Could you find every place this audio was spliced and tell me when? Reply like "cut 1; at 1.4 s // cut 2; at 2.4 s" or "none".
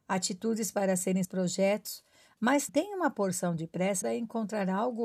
cut 1; at 1.2 s // cut 2; at 2.7 s // cut 3; at 4.0 s